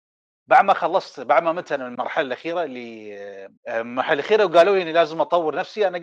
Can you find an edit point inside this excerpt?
yes; 1 cut; at 3.6 s

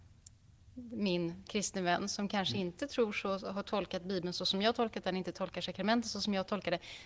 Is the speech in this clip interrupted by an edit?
no; 0 cuts

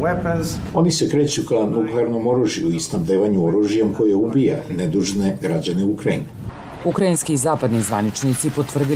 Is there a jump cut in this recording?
no; 0 cuts

